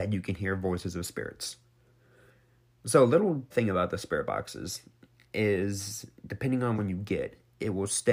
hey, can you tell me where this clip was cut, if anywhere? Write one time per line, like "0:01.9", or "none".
0:03.5
0:06.8